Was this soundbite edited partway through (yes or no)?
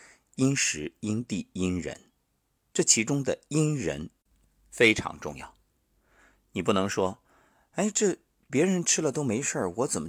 no